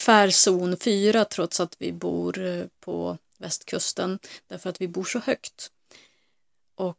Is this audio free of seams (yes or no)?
yes